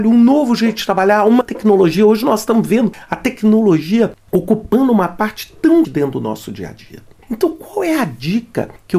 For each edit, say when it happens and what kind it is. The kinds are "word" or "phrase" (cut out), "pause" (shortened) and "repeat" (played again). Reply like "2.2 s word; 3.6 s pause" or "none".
1.4 s word; 5.8 s word

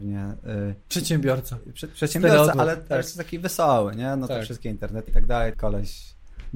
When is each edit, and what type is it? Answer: 2.5 s word; 5.1 s word; 5.5 s word

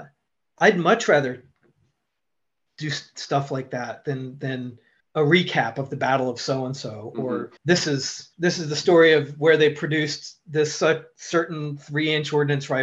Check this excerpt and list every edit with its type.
5.0 s pause; 7.6 s pause; 8.3 s pause

